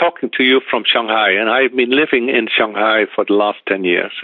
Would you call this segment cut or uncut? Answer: uncut